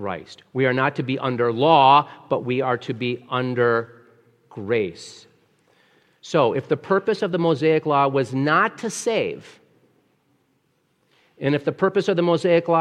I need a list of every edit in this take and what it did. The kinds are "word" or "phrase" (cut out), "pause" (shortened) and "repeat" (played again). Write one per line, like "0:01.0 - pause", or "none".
none